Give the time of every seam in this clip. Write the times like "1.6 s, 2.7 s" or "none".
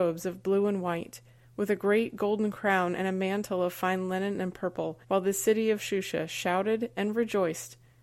5.0 s